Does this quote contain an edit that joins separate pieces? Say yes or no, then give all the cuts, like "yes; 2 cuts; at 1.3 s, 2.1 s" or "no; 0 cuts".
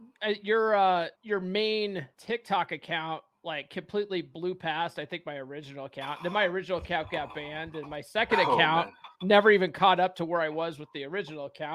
yes; 3 cuts; at 1.1 s, 2.1 s, 9.1 s